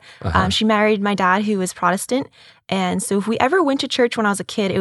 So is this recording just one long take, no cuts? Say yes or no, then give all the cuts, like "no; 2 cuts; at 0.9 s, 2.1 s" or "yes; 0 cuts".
yes; 0 cuts